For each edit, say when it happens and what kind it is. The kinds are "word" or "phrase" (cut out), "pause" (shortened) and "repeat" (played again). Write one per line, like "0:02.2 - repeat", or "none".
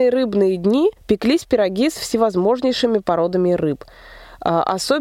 0:01.0 - pause